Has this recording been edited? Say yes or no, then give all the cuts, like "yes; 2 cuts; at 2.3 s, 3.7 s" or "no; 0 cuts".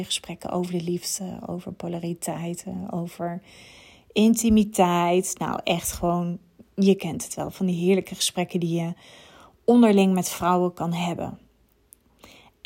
no; 0 cuts